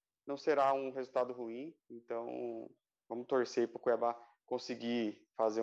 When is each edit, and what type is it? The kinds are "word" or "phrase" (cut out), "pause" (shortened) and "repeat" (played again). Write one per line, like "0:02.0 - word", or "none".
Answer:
0:01.8 - pause